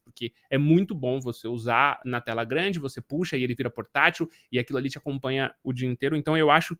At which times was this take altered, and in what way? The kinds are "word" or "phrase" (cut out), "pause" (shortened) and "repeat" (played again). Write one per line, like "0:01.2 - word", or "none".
none